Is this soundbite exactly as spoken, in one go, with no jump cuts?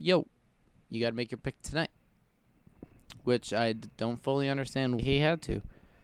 no; 1 cut; at 5.0 s

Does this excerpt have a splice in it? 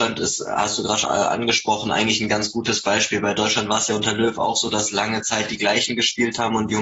yes; 1 cut; at 1.0 s

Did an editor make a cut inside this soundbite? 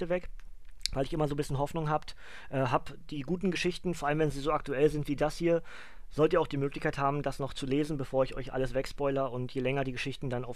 no; 0 cuts

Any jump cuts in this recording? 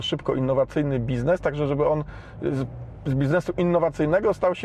no; 0 cuts

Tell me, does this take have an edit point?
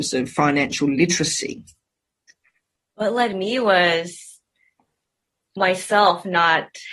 no; 0 cuts

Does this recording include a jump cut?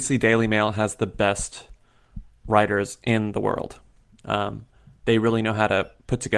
no; 0 cuts

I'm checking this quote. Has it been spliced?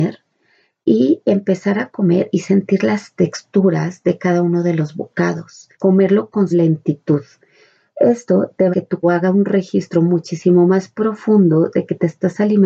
yes; 4 cuts; at 5.7 s, 6.5 s, 8.7 s, 9.0 s

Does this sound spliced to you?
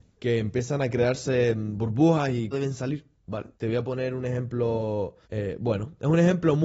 yes; 3 cuts; at 2.5 s, 3.5 s, 5.2 s

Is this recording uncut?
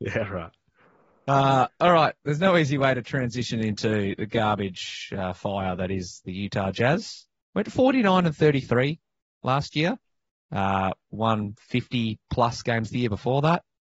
yes; 0 cuts

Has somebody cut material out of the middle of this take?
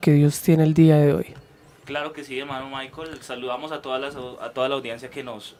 no; 0 cuts

